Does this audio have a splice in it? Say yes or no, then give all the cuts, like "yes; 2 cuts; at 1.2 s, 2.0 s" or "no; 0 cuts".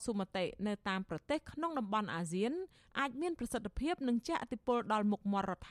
no; 0 cuts